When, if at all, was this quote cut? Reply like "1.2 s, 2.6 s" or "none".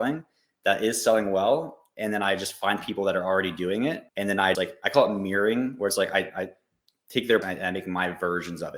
4.1 s, 4.5 s, 7.4 s